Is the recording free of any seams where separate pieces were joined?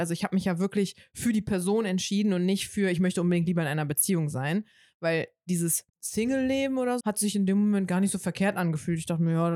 no; 2 cuts; at 5.9 s, 7.0 s

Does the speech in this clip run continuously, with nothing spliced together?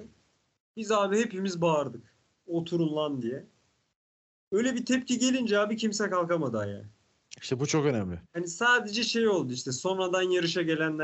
no; 1 cut; at 8.3 s

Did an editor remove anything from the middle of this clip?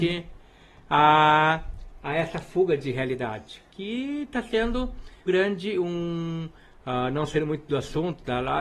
yes; 1 cut; at 5.3 s

